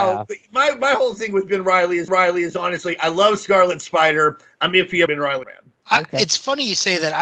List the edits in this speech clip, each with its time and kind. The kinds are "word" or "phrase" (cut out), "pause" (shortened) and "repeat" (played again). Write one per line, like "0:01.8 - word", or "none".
0:02.1 - repeat
0:05.1 - word
0:05.4 - phrase